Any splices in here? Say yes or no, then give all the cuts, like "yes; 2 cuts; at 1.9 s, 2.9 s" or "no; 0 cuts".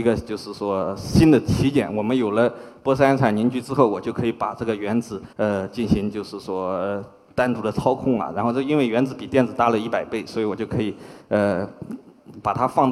yes; 1 cut; at 5.3 s